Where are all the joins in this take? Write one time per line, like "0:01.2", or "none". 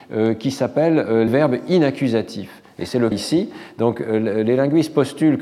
0:01.3
0:03.1